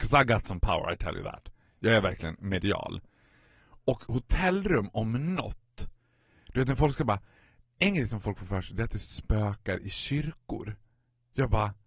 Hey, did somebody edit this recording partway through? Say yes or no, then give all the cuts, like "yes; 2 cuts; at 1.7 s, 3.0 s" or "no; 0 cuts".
no; 0 cuts